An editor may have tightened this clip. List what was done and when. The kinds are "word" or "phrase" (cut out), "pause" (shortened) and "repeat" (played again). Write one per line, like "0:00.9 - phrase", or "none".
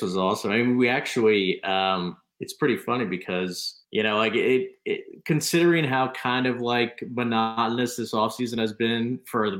0:03.8 - pause